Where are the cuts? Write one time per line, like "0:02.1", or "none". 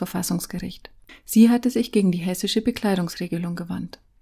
0:01.1